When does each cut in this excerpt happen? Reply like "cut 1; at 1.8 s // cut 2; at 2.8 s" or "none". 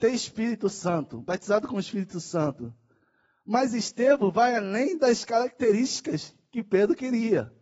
none